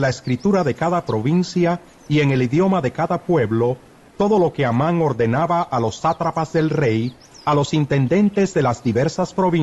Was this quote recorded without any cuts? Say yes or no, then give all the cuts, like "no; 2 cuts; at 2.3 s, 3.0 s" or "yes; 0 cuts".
yes; 0 cuts